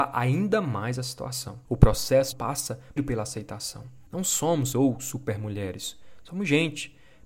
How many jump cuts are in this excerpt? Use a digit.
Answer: 5